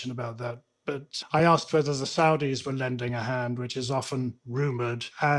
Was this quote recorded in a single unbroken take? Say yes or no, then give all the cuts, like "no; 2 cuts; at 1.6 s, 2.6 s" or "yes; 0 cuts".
yes; 0 cuts